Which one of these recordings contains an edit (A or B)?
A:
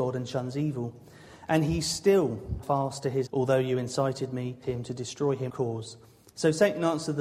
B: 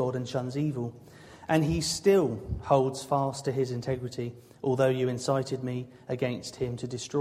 A